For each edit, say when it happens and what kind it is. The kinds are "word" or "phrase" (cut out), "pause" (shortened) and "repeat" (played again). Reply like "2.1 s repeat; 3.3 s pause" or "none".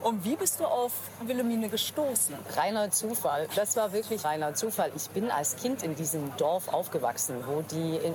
4.2 s word